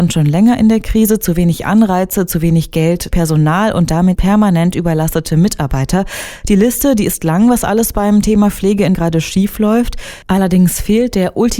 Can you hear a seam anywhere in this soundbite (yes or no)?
yes